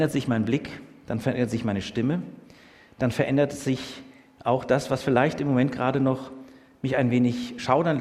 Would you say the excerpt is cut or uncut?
uncut